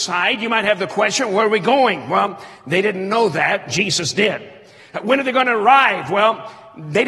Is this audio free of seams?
yes; 0 cuts

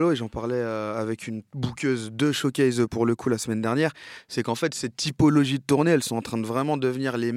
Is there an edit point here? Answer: yes; 1 cut; at 1.5 s

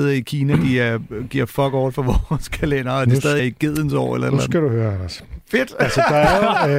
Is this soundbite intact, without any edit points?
no; 1 cut; at 3.4 s

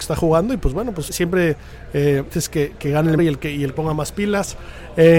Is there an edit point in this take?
yes; 4 cuts; at 1.1 s, 2.3 s, 3.2 s, 3.8 s

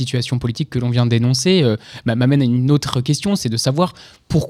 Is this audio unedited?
yes; 0 cuts

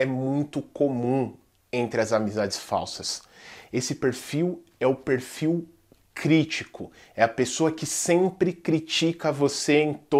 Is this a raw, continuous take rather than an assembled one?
yes; 0 cuts

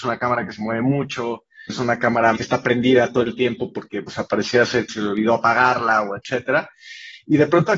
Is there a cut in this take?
yes; 4 cuts; at 1.7 s, 2.4 s, 4.1 s, 4.9 s

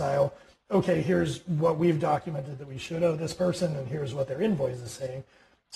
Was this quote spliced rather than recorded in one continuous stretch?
no; 0 cuts

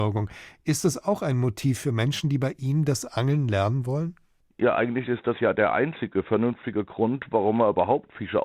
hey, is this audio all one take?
yes; 0 cuts

